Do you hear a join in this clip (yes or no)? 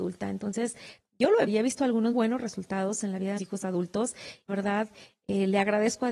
yes